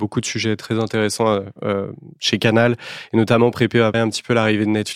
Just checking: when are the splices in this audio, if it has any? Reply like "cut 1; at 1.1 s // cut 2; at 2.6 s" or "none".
cut 1; at 3.9 s